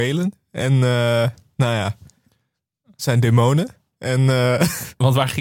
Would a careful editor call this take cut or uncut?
uncut